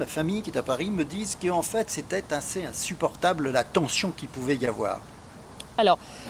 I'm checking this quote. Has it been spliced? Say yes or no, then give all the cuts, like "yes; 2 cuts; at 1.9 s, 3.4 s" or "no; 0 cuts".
no; 0 cuts